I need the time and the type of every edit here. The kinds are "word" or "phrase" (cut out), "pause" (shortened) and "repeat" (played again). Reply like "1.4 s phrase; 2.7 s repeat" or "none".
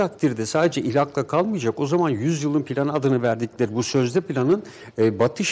none